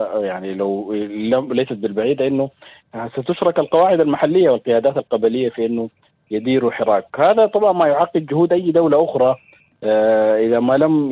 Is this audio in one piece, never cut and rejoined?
yes; 0 cuts

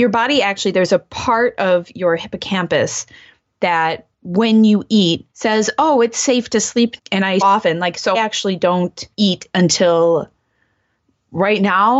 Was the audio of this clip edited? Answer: yes; 6 cuts; at 4.1 s, 5.3 s, 7.0 s, 7.4 s, 8.1 s, 9.1 s

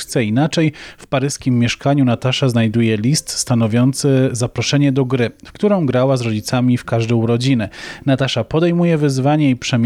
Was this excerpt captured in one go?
yes; 0 cuts

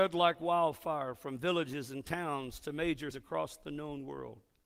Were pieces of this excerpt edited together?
yes; 1 cut; at 3.1 s

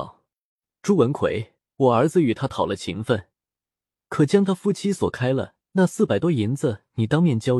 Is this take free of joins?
no; 1 cut; at 1.6 s

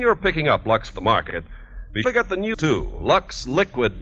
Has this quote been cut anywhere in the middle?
yes; 3 cuts; at 0.9 s, 2.0 s, 2.5 s

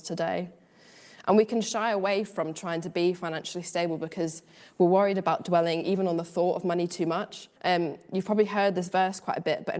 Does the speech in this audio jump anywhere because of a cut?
yes; 1 cut; at 7.6 s

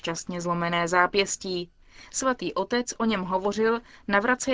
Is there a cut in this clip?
no; 0 cuts

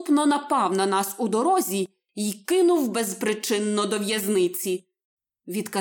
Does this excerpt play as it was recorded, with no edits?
yes; 0 cuts

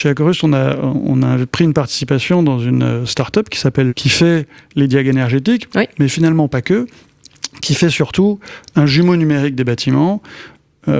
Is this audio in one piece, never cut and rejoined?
no; 1 cut; at 3.9 s

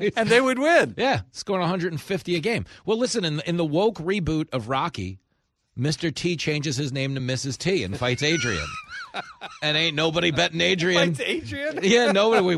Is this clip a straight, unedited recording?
yes; 0 cuts

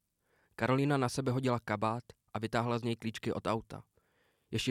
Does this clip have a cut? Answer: no; 0 cuts

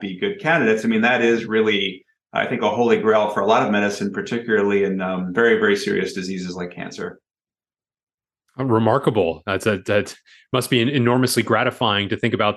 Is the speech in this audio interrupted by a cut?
no; 0 cuts

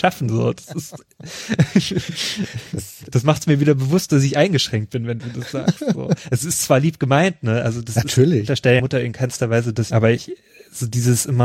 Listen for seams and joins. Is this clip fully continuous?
no; 3 cuts; at 3.0 s, 8.8 s, 9.9 s

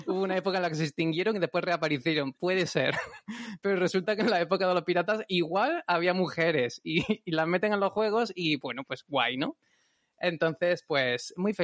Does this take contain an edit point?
no; 0 cuts

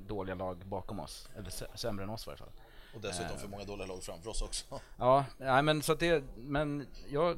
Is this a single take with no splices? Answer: yes; 0 cuts

